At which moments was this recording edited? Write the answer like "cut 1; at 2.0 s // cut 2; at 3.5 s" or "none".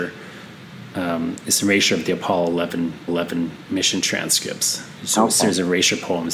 cut 1; at 3.1 s